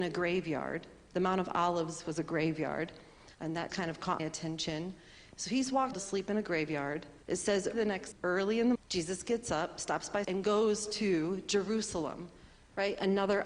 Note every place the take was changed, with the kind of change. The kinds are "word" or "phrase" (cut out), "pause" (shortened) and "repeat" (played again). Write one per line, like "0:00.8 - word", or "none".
0:03.3 - pause
0:03.7 - word
0:04.2 - word
0:05.9 - phrase
0:07.2 - pause
0:07.7 - word
0:08.1 - word
0:08.8 - word
0:10.2 - word

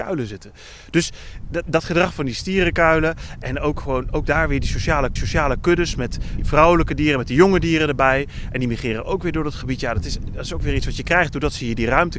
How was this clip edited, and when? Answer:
0:05.2 - repeat
0:06.4 - word

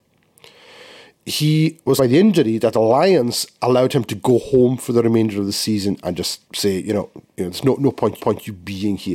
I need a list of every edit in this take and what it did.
0:02.0 - phrase
0:06.4 - pause
0:07.3 - pause
0:08.2 - repeat

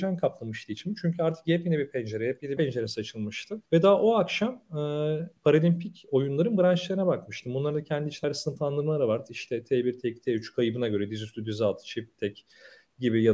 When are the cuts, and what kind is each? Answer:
0:02.6 - phrase
0:03.7 - pause
0:05.4 - pause
0:08.2 - word

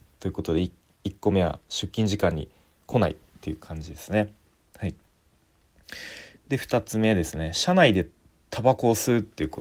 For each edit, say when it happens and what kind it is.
none

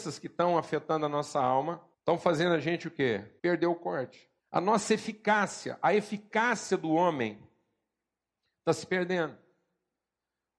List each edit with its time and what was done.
0:01.9 - pause
0:03.4 - pause
0:04.4 - pause

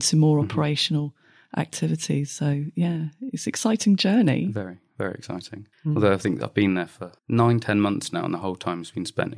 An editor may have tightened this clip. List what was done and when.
0:05.7 - pause
0:07.2 - pause

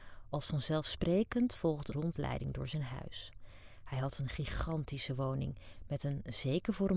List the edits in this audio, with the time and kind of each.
0:01.9 - word

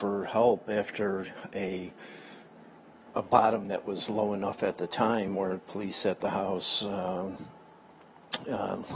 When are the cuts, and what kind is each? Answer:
none

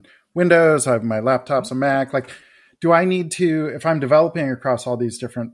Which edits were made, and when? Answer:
none

